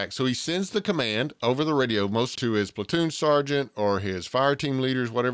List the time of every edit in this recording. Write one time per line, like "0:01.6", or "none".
0:02.3